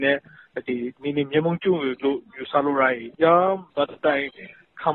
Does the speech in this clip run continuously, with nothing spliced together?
no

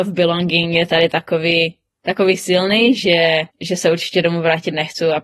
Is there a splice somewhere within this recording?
yes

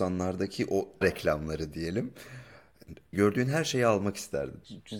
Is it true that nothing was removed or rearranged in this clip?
no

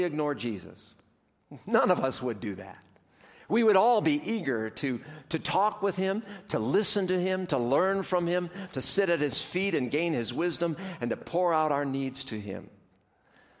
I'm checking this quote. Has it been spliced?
no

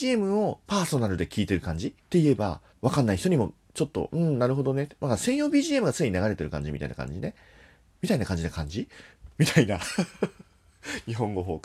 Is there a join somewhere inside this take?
yes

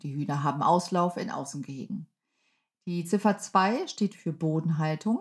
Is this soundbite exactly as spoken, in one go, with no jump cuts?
yes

